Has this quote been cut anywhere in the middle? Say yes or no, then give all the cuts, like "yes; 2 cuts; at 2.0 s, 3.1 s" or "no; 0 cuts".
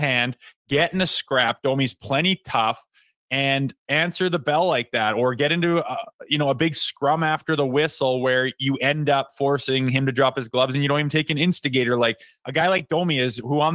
no; 0 cuts